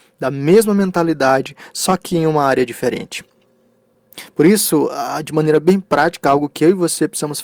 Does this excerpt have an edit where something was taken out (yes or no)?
no